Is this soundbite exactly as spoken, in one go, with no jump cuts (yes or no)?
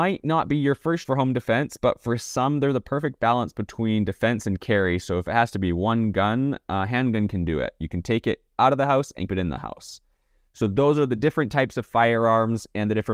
no